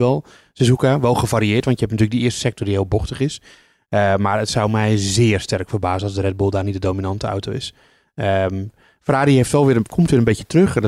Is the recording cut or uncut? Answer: uncut